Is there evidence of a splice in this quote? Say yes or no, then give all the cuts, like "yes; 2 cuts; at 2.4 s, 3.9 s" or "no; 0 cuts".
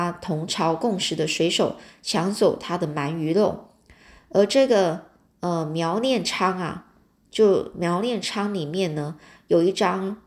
no; 0 cuts